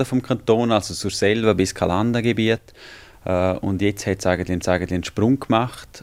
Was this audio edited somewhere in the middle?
yes; 1 cut; at 4.6 s

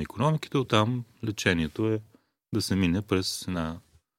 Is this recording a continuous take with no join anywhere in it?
yes; 0 cuts

